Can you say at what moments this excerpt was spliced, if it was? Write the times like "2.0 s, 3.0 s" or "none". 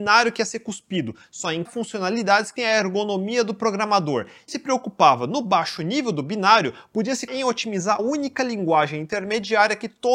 1.7 s, 2.6 s, 4.5 s, 7.3 s, 8.0 s